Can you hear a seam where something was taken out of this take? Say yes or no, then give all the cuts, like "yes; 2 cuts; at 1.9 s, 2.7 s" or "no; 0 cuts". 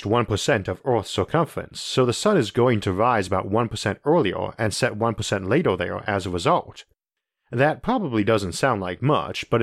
no; 0 cuts